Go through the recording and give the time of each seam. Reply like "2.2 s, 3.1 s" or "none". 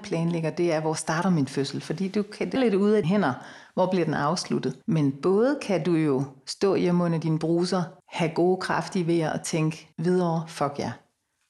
2.6 s, 3.0 s, 4.8 s, 8.0 s, 9.9 s